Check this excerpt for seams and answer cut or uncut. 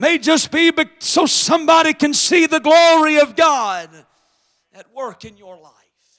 uncut